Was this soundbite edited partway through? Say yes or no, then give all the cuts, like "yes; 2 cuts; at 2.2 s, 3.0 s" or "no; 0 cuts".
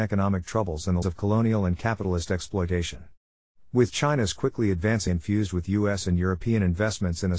yes; 2 cuts; at 1.0 s, 5.1 s